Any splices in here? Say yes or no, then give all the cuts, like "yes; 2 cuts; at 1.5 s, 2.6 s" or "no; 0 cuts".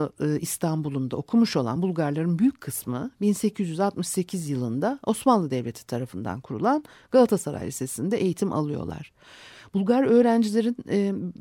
no; 0 cuts